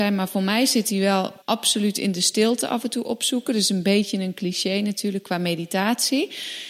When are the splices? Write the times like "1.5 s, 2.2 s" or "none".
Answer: 1.4 s

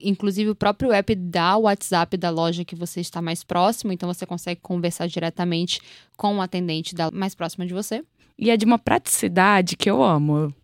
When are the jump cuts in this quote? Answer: 7.1 s

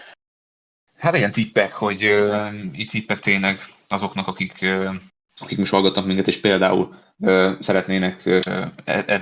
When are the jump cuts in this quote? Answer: 5.1 s

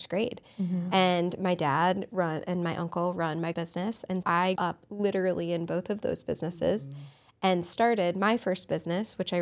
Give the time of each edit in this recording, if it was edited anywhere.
3.5 s, 4.2 s, 4.6 s

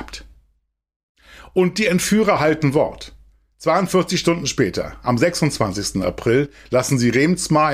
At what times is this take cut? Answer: none

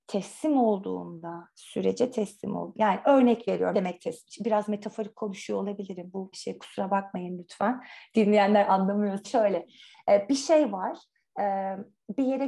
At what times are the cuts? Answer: 3.7 s, 6.3 s, 9.2 s

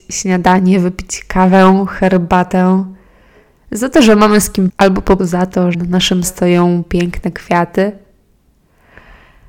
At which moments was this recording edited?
4.7 s, 5.2 s, 5.7 s, 6.2 s

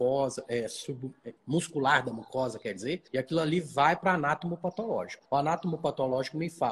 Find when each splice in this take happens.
1.4 s, 3.1 s, 5.2 s

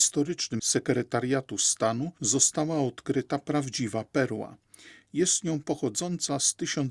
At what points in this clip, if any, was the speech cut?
none

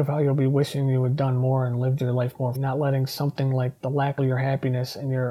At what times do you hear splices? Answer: 2.5 s, 4.2 s

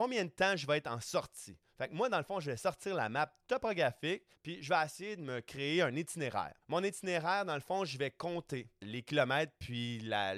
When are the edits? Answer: 4.4 s, 6.6 s, 8.8 s

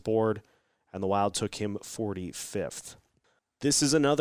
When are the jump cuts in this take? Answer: none

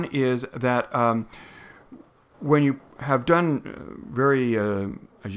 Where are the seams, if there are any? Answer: none

